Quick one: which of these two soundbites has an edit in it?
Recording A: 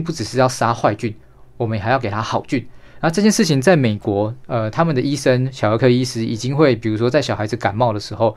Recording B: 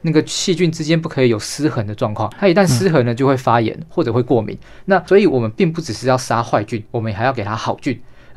B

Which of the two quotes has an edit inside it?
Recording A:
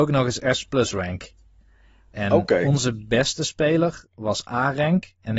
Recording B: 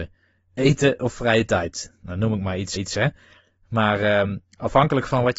B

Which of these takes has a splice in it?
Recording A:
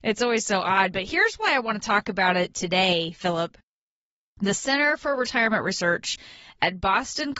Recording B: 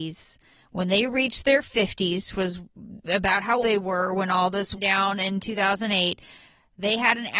B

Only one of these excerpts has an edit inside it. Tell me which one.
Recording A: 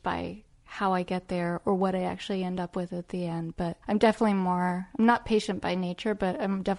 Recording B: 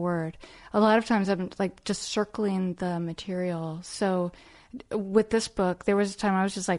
A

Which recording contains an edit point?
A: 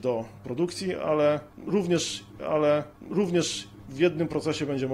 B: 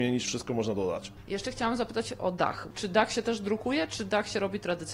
A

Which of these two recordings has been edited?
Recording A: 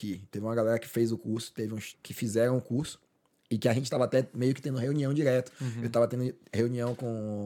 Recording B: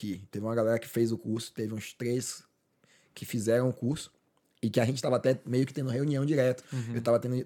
A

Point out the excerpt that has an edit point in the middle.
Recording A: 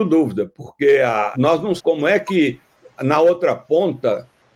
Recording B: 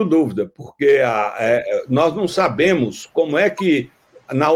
A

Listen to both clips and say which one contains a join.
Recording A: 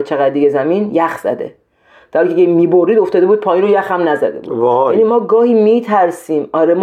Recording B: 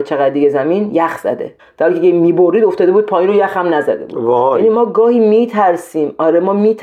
B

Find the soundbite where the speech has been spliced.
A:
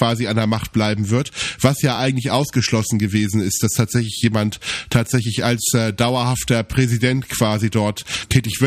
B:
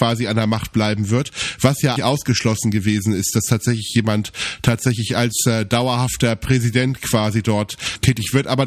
B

